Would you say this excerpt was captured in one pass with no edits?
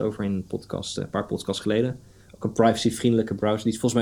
yes; 0 cuts

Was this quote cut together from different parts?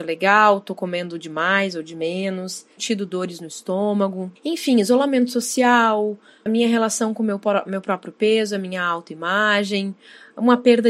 yes; 3 cuts; at 2.8 s, 4.4 s, 6.5 s

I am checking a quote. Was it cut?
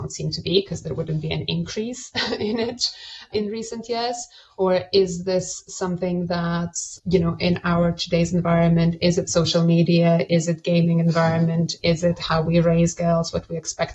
no; 0 cuts

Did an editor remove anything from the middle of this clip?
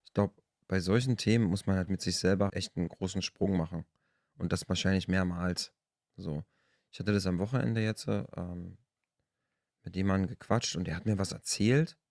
yes; 2 cuts; at 1.9 s, 2.5 s

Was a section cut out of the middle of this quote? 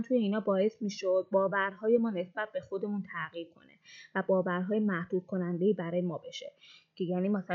no; 0 cuts

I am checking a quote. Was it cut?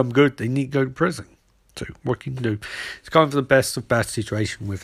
no; 0 cuts

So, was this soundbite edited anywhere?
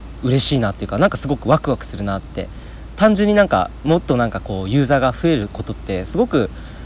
no; 0 cuts

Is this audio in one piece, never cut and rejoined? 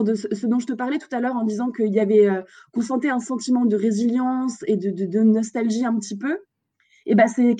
yes; 0 cuts

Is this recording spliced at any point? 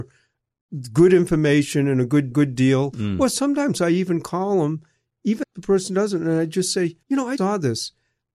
yes; 4 cuts; at 2.3 s, 5.4 s, 7.0 s, 7.4 s

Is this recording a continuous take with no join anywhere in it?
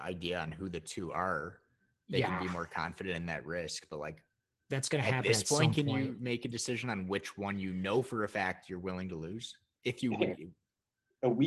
yes; 0 cuts

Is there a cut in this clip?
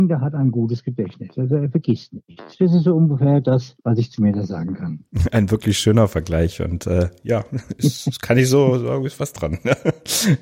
yes; 1 cut; at 3.8 s

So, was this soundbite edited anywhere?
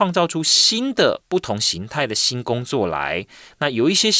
no; 0 cuts

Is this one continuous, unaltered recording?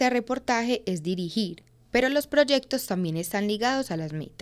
yes; 0 cuts

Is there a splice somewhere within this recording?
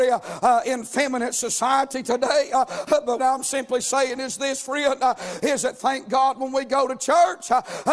yes; 1 cut; at 3.2 s

